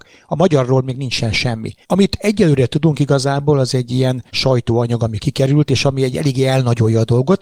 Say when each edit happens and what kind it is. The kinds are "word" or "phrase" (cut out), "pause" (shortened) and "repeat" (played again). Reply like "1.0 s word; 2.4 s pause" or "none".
1.8 s pause; 4.3 s pause